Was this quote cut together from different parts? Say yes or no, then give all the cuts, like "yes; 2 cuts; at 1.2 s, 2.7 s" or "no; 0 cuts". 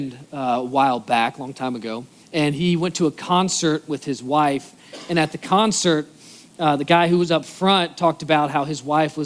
yes; 1 cut; at 2.2 s